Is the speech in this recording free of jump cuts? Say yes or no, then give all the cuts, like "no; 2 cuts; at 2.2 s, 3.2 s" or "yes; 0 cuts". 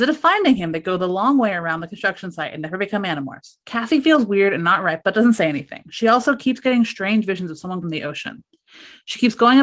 no; 3 cuts; at 3.6 s, 5.0 s, 7.8 s